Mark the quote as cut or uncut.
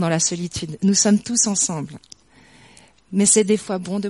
uncut